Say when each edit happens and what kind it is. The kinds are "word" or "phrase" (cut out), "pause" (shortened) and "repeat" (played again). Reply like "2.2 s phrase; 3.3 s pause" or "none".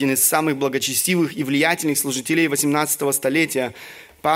none